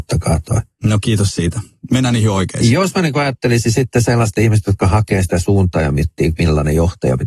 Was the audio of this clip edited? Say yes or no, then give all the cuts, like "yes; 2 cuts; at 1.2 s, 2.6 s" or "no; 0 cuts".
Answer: yes; 1 cut; at 4.3 s